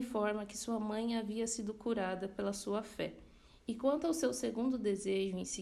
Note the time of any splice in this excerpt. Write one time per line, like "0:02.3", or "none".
none